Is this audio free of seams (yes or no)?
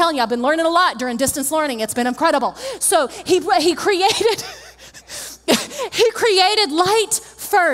yes